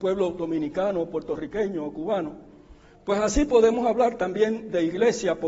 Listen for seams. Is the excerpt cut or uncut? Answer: uncut